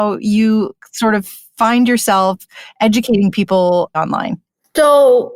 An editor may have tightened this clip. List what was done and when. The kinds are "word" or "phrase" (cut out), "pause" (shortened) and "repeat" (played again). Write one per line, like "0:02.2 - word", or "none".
0:03.9 - phrase

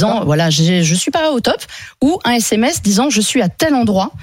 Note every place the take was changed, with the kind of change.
0:01.4 - word

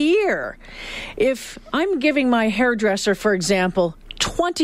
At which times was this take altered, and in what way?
none

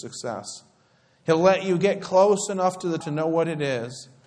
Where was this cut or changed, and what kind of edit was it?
0:03.0 - word

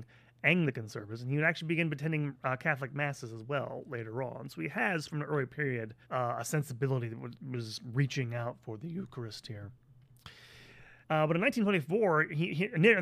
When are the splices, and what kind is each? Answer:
0:06.0 - pause
0:11.0 - pause

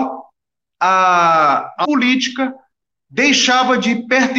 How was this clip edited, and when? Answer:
0:01.8 - word

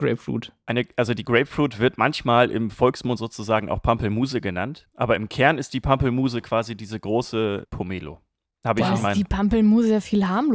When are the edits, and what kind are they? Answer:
none

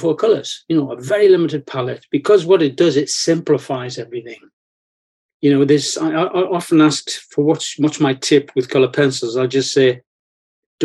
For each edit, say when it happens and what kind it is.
none

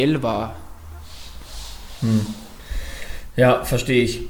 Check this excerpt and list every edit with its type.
none

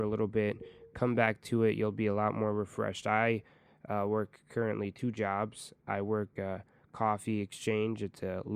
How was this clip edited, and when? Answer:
none

